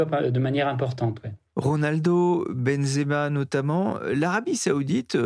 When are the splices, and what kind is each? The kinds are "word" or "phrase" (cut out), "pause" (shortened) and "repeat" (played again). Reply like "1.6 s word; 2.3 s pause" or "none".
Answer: none